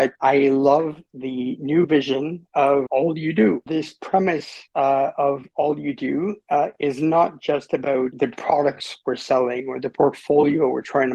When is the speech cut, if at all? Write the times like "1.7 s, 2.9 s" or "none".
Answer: none